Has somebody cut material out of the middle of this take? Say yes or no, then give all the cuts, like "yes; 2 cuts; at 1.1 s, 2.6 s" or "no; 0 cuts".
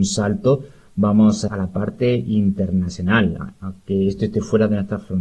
yes; 1 cut; at 1.5 s